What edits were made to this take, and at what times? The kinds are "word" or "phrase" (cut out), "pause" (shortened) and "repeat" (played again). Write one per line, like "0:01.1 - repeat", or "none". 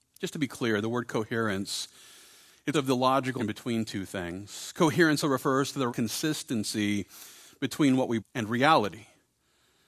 0:02.7 - word
0:03.4 - word
0:05.2 - word
0:05.9 - word
0:08.2 - word